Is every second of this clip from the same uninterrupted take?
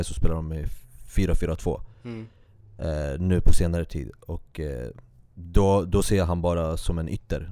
yes; 0 cuts

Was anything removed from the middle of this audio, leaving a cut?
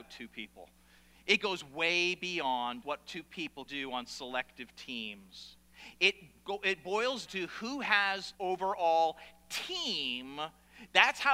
yes; 4 cuts; at 2.8 s, 3.7 s, 7.3 s, 8.3 s

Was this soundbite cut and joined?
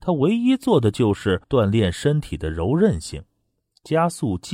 yes; 1 cut; at 1.4 s

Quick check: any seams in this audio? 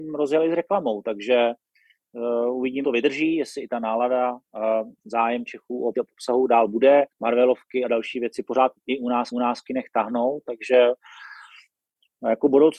yes; 4 cuts; at 2.8 s, 5.9 s, 7.1 s, 9.3 s

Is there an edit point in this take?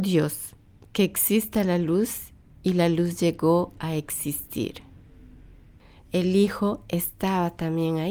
no; 0 cuts

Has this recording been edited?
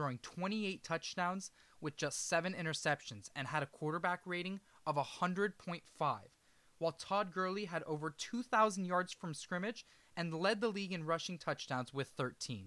no; 0 cuts

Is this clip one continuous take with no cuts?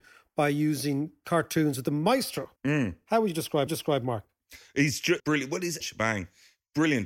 no; 4 cuts; at 2.6 s, 3.7 s, 5.2 s, 5.8 s

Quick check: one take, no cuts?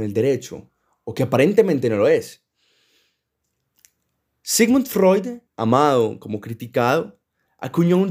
no; 1 cut; at 5.5 s

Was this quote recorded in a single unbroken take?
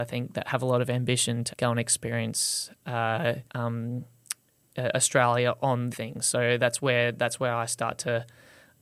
no; 3 cuts; at 1.5 s, 3.5 s, 5.9 s

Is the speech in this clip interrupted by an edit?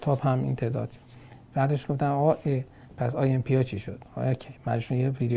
no; 0 cuts

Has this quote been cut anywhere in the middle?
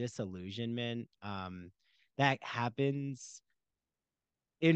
no; 0 cuts

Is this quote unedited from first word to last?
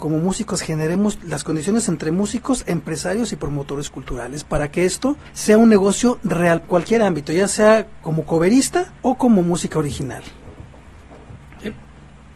no; 5 cuts; at 1.9 s, 5.2 s, 6.6 s, 8.0 s, 9.0 s

